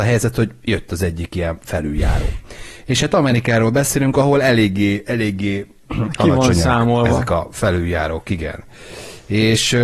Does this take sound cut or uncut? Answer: uncut